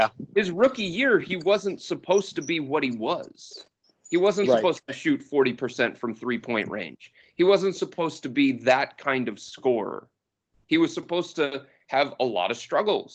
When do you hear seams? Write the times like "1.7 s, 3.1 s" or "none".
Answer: none